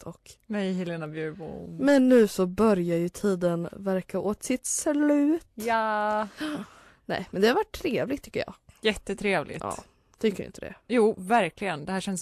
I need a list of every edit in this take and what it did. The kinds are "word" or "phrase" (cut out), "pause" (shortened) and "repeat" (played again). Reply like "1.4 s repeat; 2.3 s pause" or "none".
10.8 s pause